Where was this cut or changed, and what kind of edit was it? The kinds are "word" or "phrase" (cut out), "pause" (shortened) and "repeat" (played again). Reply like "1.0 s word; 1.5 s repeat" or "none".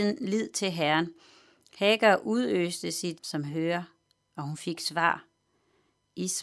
3.2 s phrase